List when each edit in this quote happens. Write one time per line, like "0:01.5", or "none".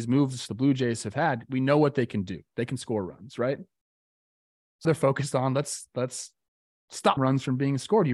0:04.8
0:07.2